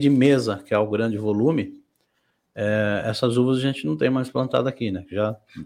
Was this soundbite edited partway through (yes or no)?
no